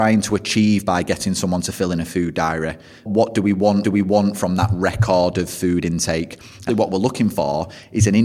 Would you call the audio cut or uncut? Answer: cut